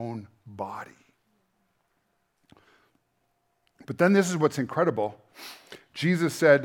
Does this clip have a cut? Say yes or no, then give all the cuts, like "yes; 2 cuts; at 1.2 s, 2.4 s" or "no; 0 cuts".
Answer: no; 0 cuts